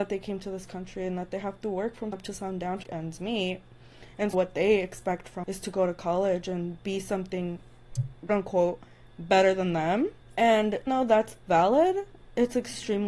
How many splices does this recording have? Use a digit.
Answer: 6